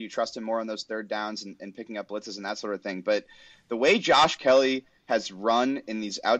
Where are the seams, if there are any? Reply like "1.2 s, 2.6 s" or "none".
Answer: none